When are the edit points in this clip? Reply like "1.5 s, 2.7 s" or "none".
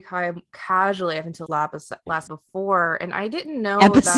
1.5 s, 2.3 s